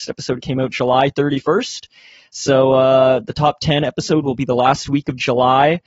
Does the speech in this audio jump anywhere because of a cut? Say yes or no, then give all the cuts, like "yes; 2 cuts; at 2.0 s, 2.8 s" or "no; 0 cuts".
no; 0 cuts